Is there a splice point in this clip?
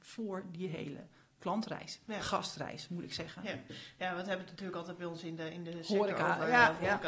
no; 0 cuts

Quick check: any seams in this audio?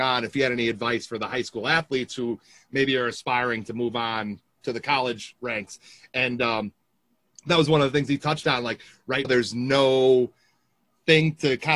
yes; 1 cut; at 9.2 s

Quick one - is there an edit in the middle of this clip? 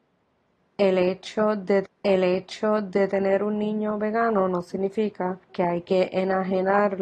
yes; 2 cuts; at 1.9 s, 5.4 s

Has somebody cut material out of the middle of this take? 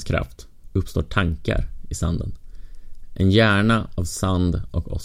no; 0 cuts

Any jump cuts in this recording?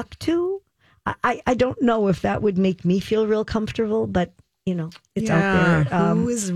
no; 0 cuts

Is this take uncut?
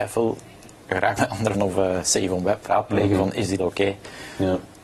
no; 4 cuts; at 1.2 s, 1.5 s, 2.7 s, 3.6 s

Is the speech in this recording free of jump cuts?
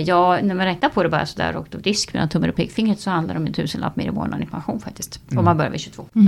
yes; 0 cuts

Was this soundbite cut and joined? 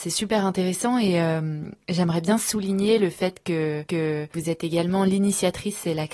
yes; 1 cut; at 3.9 s

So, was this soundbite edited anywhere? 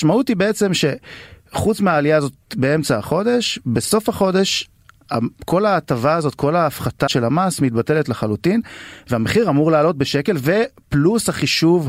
yes; 1 cut; at 7.1 s

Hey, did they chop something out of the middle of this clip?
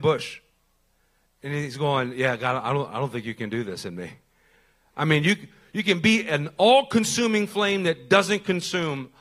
no; 0 cuts

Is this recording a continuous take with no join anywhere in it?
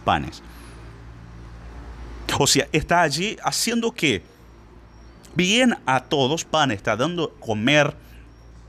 no; 4 cuts; at 2.7 s, 5.4 s, 6.4 s, 7.4 s

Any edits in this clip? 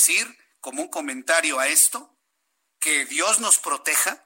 no; 0 cuts

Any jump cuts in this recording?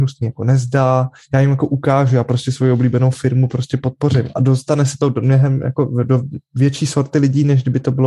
no; 0 cuts

